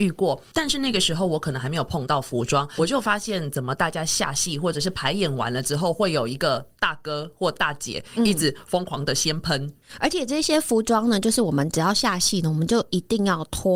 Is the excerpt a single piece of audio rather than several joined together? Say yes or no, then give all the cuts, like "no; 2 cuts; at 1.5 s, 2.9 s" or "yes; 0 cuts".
no; 1 cut; at 2.8 s